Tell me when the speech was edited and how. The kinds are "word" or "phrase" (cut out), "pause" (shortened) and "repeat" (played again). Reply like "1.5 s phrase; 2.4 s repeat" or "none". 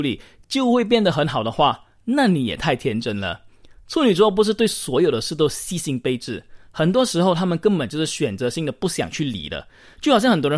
none